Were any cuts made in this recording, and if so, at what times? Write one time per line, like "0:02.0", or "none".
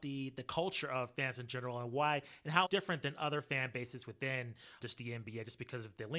0:01.1
0:02.6
0:04.8